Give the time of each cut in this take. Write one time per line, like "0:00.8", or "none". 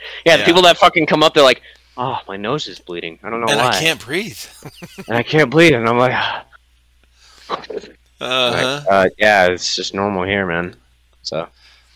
none